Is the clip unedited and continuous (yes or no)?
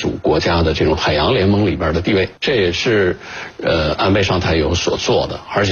no